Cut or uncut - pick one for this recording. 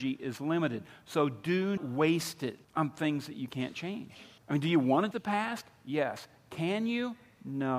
cut